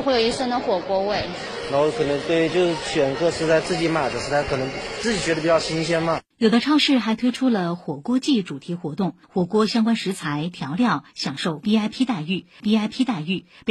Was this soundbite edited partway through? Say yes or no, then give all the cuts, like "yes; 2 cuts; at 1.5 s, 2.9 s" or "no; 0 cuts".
yes; 3 cuts; at 6.3 s, 9.2 s, 12.6 s